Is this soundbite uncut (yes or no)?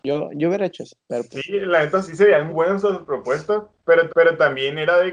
no